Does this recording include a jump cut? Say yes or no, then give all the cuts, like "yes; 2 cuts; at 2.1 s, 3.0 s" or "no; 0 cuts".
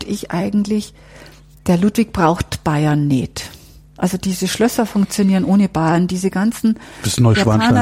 no; 0 cuts